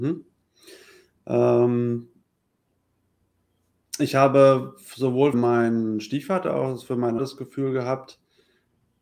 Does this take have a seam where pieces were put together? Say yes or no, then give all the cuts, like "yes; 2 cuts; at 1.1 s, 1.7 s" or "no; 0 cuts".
yes; 2 cuts; at 5.3 s, 7.2 s